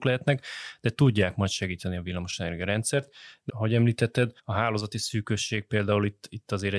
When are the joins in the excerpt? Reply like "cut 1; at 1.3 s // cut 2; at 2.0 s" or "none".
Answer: cut 1; at 3.5 s // cut 2; at 4.4 s